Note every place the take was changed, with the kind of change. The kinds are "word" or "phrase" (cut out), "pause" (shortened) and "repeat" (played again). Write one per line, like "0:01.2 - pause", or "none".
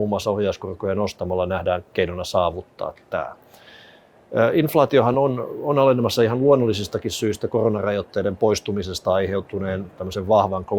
none